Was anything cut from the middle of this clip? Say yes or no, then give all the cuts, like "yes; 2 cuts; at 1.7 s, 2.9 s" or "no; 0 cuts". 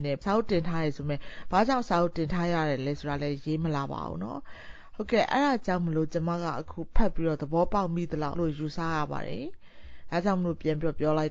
yes; 1 cut; at 8.3 s